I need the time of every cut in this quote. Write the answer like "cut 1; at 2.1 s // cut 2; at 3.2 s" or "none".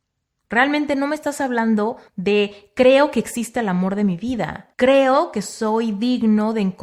cut 1; at 2.1 s // cut 2; at 4.7 s